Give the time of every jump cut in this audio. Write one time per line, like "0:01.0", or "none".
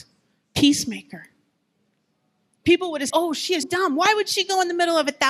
0:03.1
0:03.6